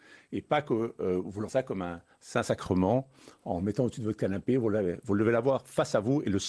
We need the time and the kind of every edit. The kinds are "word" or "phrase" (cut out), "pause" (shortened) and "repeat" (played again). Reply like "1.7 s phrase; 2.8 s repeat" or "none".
1.5 s phrase